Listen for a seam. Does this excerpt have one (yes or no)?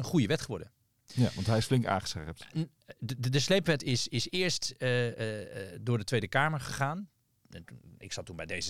yes